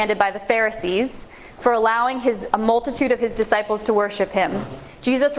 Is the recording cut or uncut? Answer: uncut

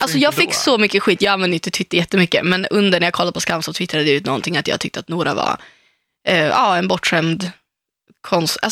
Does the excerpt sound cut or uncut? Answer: uncut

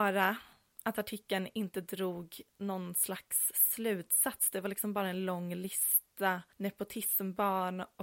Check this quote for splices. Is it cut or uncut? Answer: cut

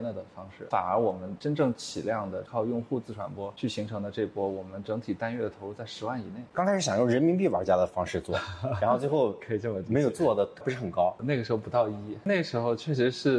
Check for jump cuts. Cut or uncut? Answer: cut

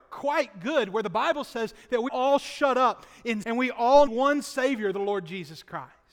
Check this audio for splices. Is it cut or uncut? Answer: cut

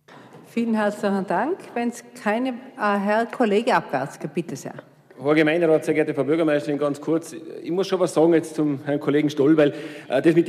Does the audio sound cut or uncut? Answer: uncut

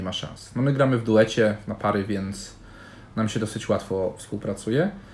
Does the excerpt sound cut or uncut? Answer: uncut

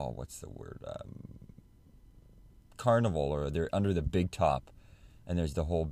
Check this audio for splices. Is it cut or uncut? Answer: uncut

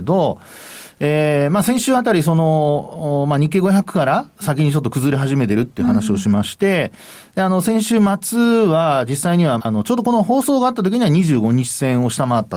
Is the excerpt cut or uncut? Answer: cut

